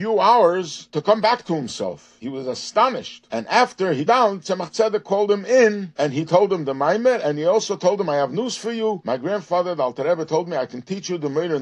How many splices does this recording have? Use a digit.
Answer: 1